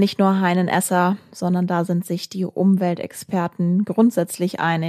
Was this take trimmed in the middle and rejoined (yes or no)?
no